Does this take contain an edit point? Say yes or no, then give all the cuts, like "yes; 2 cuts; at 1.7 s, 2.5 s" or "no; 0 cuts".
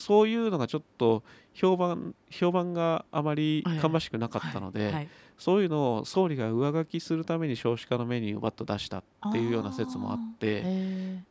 no; 0 cuts